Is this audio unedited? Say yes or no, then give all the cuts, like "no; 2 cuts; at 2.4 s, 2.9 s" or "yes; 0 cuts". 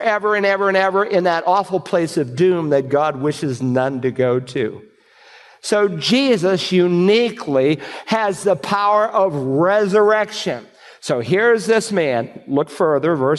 yes; 0 cuts